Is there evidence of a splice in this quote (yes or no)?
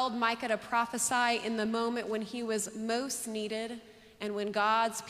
no